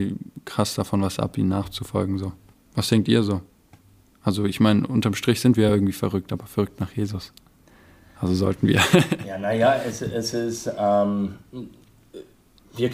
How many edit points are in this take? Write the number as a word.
zero